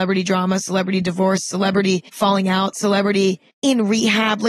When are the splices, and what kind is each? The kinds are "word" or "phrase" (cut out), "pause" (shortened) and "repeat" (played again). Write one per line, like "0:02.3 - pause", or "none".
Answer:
0:02.1 - pause
0:03.5 - pause